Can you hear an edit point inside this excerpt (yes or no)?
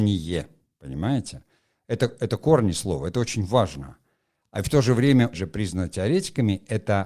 yes